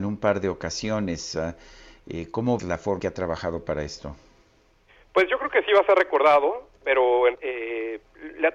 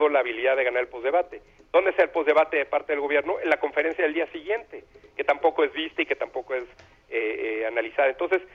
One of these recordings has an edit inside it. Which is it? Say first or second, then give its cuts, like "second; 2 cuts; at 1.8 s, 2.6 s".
first; 3 cuts; at 2.6 s, 3.0 s, 7.3 s